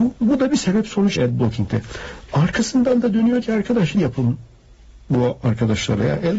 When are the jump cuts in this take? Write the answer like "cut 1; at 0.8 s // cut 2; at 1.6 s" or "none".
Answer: cut 1; at 1.2 s // cut 2; at 3.4 s // cut 3; at 3.9 s